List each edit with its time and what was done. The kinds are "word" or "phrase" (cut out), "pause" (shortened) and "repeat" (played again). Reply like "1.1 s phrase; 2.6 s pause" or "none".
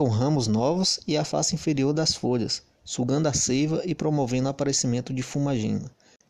none